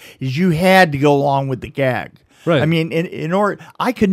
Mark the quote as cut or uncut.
uncut